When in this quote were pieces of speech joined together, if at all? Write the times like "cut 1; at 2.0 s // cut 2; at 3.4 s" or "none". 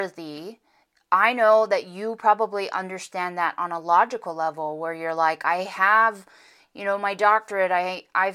none

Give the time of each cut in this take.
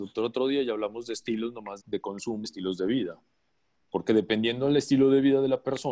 cut 1; at 1.8 s // cut 2; at 2.4 s

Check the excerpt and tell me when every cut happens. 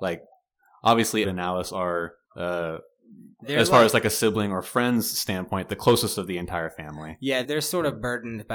cut 1; at 1.2 s // cut 2; at 2.2 s // cut 3; at 7.4 s

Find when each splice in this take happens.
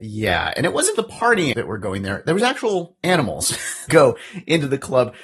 cut 1; at 0.9 s // cut 2; at 1.5 s // cut 3; at 3.9 s

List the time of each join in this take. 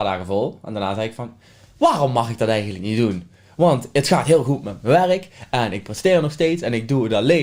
none

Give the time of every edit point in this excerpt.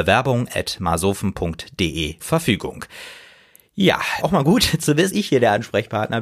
cut 1; at 2.2 s // cut 2; at 4.2 s // cut 3; at 5.1 s

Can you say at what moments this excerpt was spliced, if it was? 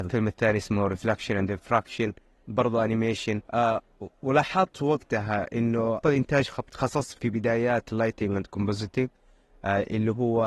cut 1; at 3.4 s // cut 2; at 6.0 s // cut 3; at 6.7 s // cut 4; at 7.2 s

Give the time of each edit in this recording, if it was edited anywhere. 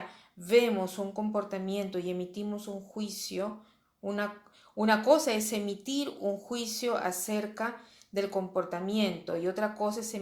none

